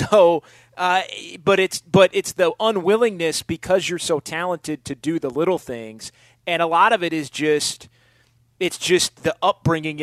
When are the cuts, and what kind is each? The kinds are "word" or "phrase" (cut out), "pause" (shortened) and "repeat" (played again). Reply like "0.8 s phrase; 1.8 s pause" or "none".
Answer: none